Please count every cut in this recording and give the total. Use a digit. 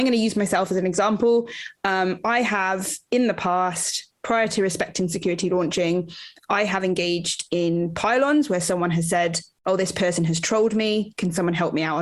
0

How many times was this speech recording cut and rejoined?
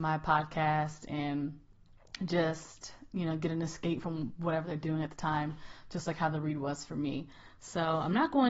0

